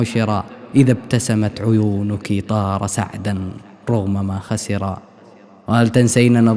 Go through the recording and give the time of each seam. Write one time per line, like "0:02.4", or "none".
none